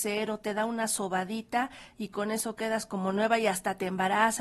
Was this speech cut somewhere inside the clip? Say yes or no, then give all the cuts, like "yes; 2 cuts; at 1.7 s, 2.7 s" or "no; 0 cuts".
no; 0 cuts